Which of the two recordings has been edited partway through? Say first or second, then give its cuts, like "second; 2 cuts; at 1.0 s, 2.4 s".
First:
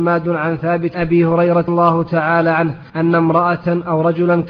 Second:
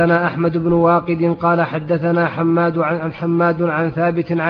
first; 3 cuts; at 0.9 s, 1.7 s, 2.9 s